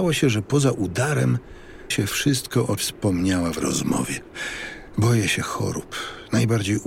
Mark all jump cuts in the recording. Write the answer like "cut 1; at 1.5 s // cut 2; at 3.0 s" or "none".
cut 1; at 1.9 s // cut 2; at 2.8 s // cut 3; at 3.6 s